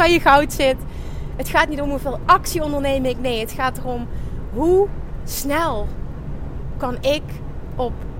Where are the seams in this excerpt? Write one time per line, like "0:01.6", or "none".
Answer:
none